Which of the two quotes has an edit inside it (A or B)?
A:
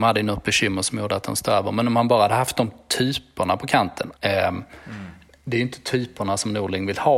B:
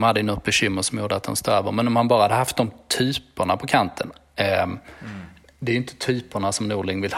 A